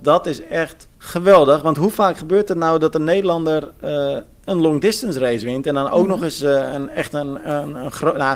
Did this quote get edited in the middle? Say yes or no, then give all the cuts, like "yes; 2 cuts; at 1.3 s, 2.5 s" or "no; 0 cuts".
yes; 1 cut; at 0.9 s